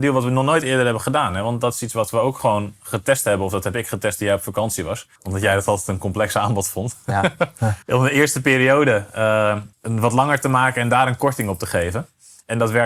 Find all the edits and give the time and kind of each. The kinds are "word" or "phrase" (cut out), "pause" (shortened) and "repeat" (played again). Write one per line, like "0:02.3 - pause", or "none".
0:05.2 - pause
0:07.8 - pause
0:09.7 - pause